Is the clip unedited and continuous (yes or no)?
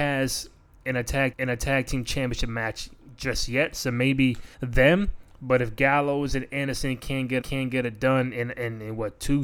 no